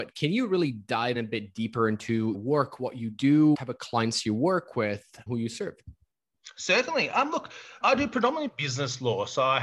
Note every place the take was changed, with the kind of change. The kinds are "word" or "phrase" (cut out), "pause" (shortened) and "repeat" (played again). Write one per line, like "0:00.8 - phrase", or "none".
0:01.1 - word
0:02.3 - word
0:03.5 - word
0:05.3 - word
0:07.8 - word